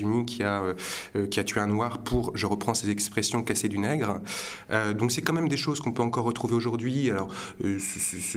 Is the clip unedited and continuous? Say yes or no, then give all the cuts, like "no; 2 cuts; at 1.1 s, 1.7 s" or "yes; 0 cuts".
yes; 0 cuts